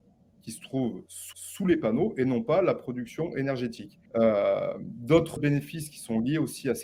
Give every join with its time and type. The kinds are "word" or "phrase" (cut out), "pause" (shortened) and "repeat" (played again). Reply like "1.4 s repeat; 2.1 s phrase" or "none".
1.3 s repeat; 4.1 s pause; 5.4 s word